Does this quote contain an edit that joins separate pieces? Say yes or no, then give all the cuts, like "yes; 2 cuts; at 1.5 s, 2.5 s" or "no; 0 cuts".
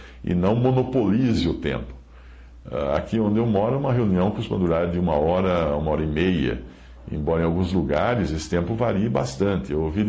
no; 0 cuts